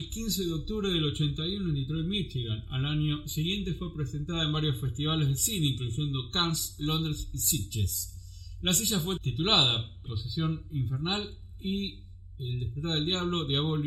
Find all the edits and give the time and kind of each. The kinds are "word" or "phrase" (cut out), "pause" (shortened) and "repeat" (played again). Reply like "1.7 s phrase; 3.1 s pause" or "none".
9.2 s word; 10.1 s word

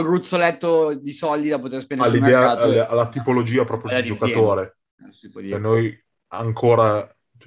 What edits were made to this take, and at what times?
none

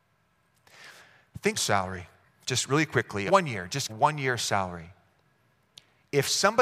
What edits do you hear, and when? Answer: 1.5 s phrase; 2.2 s pause; 3.3 s phrase; 3.9 s phrase

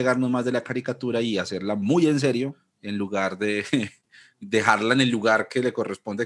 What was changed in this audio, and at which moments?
none

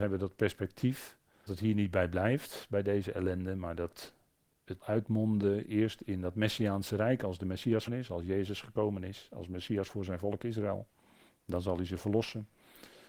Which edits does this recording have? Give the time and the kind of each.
1.5 s word; 4.8 s word; 7.9 s word

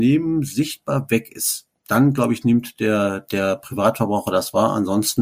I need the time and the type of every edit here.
none

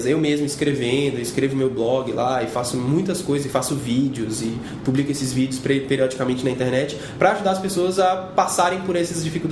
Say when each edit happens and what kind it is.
none

